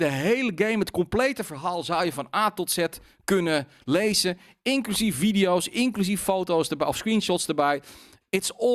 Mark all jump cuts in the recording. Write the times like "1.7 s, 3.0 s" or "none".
none